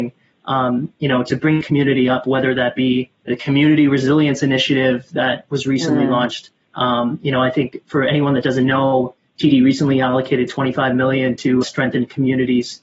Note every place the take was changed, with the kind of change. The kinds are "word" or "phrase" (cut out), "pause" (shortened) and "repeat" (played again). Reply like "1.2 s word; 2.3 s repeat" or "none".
1.6 s word; 3.3 s word; 11.6 s word

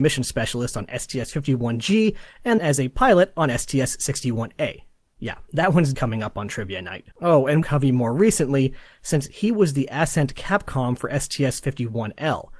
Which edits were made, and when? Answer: 2.6 s word; 5.1 s pause; 5.9 s word; 7.1 s pause; 7.6 s phrase

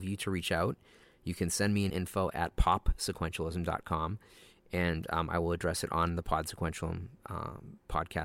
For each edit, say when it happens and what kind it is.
1.9 s word

